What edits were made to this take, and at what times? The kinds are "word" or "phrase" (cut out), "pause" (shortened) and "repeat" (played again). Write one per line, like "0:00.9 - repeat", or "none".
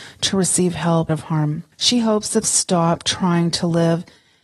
0:01.1 - word
0:01.7 - pause
0:02.4 - phrase